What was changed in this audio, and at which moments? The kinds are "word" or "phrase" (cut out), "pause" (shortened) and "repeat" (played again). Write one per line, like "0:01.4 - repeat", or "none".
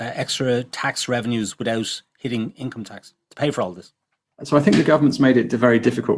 none